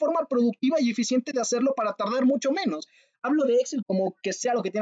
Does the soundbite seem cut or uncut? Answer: cut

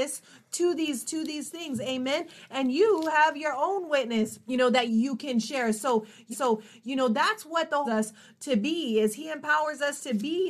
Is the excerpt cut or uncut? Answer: cut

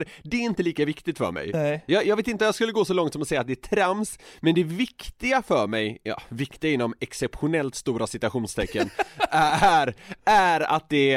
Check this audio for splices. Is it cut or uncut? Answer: uncut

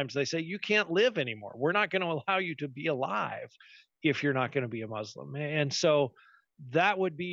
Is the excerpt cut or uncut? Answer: uncut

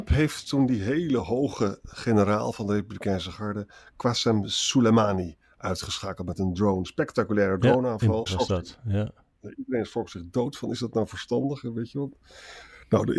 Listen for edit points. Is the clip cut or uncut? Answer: cut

